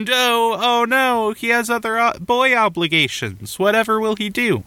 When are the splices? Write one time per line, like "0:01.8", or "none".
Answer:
none